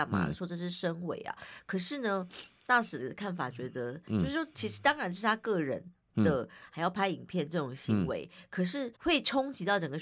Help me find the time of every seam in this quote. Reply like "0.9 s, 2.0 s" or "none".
8.9 s